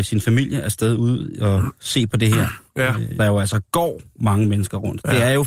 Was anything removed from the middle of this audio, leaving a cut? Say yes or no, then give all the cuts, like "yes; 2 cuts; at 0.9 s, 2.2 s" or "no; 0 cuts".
yes; 1 cut; at 3.2 s